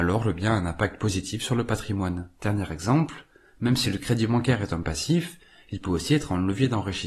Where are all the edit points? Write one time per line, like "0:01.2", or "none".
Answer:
0:02.4